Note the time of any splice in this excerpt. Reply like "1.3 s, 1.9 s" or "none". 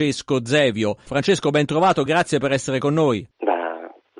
none